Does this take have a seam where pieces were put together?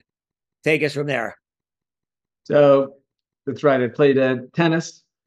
no; 0 cuts

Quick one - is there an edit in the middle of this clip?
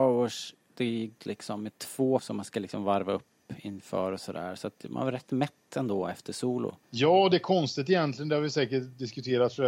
yes; 3 cuts; at 1.2 s, 2.2 s, 6.8 s

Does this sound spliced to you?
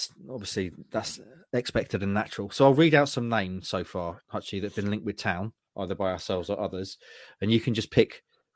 no; 0 cuts

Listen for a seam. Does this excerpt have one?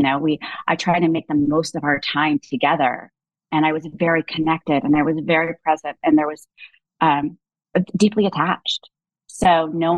no; 0 cuts

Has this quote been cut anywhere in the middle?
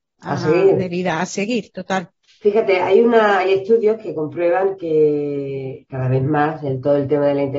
yes; 1 cut; at 2.2 s

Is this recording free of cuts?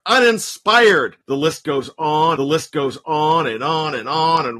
no; 2 cuts; at 1.2 s, 2.4 s

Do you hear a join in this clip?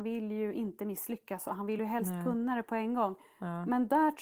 no; 0 cuts

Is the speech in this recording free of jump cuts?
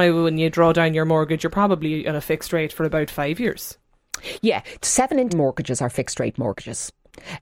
no; 1 cut; at 5.3 s

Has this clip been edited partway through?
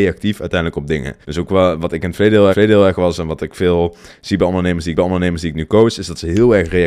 yes; 3 cuts; at 1.2 s, 2.5 s, 5.0 s

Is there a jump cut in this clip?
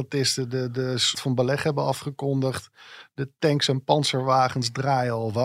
yes; 1 cut; at 1.1 s

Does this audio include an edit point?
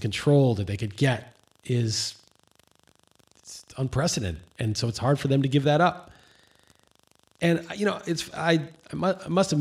no; 0 cuts

